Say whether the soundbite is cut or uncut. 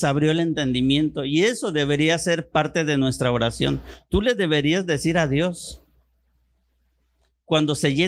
uncut